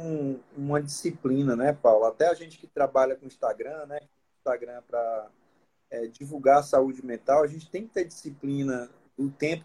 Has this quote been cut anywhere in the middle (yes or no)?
no